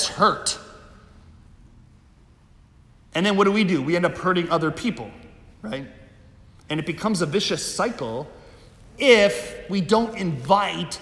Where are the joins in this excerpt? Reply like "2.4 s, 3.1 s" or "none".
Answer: none